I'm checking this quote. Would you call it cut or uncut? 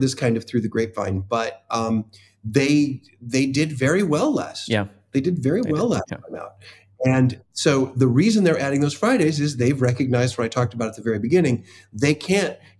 uncut